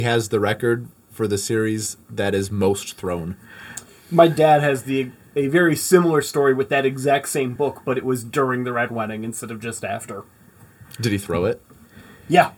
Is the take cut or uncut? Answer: uncut